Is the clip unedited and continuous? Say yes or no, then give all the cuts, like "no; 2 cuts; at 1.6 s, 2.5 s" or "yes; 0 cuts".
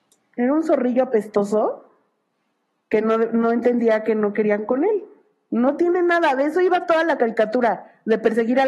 yes; 0 cuts